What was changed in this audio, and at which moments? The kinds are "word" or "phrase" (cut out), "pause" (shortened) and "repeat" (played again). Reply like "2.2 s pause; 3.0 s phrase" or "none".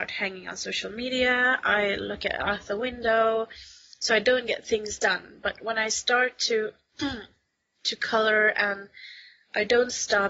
none